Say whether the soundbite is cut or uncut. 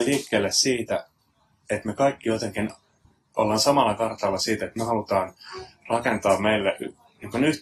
uncut